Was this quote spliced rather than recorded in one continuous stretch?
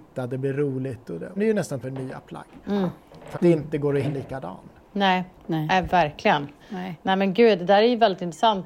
yes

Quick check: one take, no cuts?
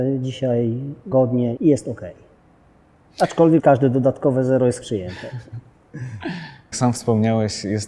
no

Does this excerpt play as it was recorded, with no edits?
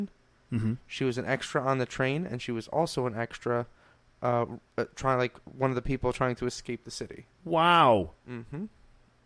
no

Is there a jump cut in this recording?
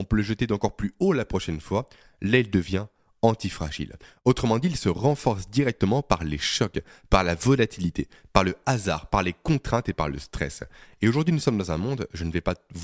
no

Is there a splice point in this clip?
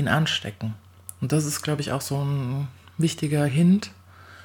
no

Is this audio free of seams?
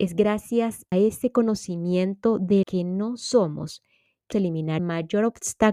no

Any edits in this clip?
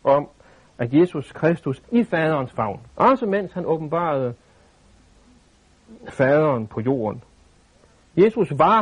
yes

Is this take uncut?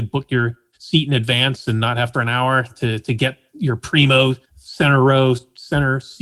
no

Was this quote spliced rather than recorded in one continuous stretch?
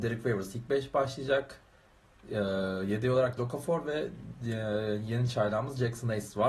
yes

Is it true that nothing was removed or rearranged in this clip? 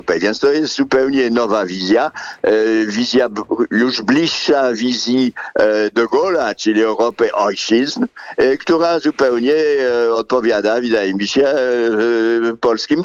yes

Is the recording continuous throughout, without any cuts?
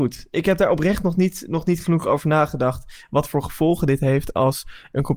yes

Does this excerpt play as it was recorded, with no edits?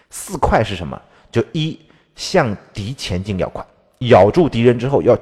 no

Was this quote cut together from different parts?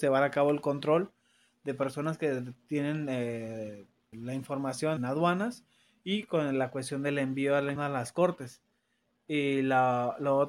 yes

